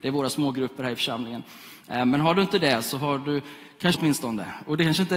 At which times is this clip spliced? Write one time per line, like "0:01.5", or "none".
0:03.9